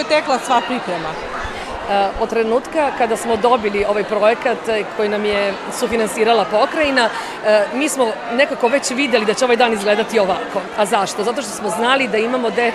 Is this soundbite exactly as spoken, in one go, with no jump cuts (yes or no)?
yes